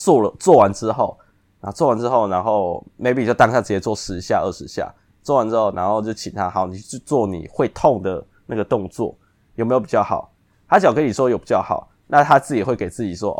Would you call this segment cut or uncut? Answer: uncut